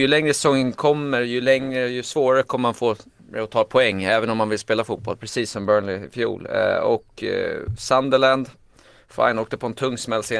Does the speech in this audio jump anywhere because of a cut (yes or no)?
no